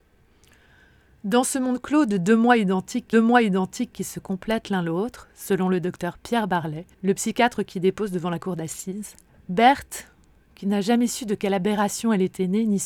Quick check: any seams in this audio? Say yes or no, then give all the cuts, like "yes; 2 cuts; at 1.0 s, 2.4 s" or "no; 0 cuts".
yes; 3 cuts; at 3.1 s, 6.9 s, 9.3 s